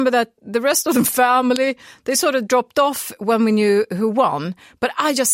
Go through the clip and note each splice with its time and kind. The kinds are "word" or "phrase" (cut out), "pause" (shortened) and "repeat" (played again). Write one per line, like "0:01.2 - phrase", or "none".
none